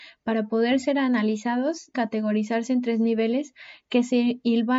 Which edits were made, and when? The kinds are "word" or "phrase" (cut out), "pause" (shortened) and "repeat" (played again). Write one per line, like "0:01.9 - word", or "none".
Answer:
0:01.9 - word